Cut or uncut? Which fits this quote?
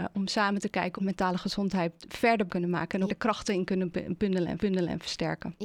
cut